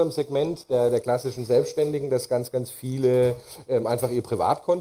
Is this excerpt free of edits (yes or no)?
yes